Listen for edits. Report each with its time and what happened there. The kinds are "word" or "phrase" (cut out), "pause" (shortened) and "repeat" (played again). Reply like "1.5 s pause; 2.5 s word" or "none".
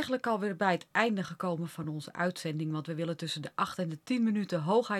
none

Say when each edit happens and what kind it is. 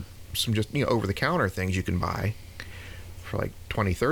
none

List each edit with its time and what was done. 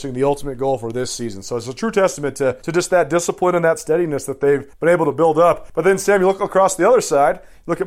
none

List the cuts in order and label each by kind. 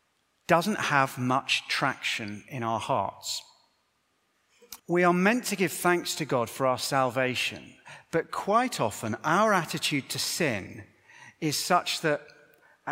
4.8 s pause

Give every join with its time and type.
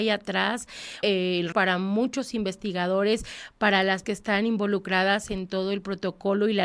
1.0 s word; 1.5 s word; 4.0 s word

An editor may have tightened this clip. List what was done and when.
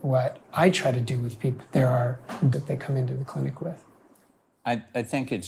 1.6 s word; 2.5 s phrase

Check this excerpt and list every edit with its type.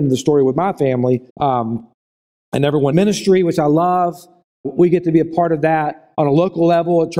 1.3 s pause; 2.9 s phrase; 4.6 s word

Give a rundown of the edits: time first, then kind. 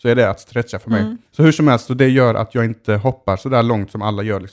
1.3 s pause

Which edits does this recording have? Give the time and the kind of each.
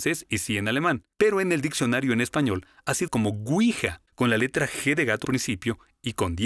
1.1 s pause; 3.1 s word; 4.1 s pause; 5.2 s word

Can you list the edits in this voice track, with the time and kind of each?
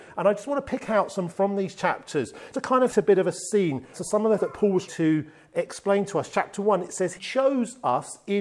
1.3 s word; 2.5 s word; 2.9 s word; 3.9 s word; 4.4 s word; 4.9 s word; 7.2 s word

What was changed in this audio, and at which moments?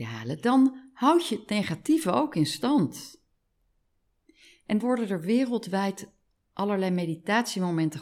4.8 s word

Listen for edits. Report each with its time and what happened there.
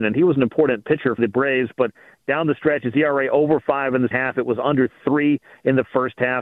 1.2 s word; 4.1 s word

